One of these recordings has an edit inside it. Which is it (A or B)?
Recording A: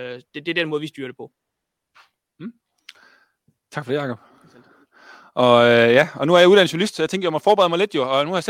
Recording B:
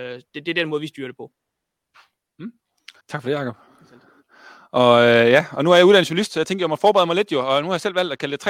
B